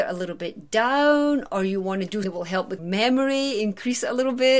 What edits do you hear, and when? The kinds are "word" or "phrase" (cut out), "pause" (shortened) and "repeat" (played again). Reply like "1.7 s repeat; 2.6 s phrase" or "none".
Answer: 2.2 s word; 2.8 s word